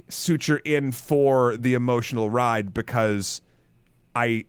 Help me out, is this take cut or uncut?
uncut